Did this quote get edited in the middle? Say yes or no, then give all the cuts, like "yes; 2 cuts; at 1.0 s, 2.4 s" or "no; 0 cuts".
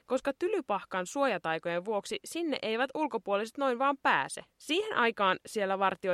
yes; 1 cut; at 4.5 s